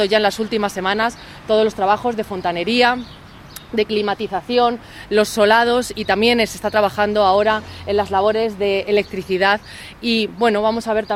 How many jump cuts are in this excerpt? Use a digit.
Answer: 0